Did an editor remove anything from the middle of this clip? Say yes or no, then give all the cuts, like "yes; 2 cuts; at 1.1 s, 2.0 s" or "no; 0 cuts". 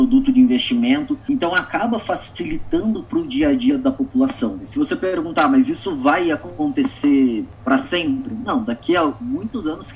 no; 0 cuts